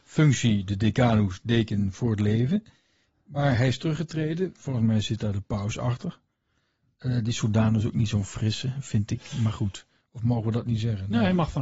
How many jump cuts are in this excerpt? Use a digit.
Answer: 0